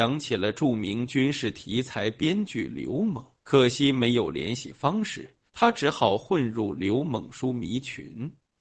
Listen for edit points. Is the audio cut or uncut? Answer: cut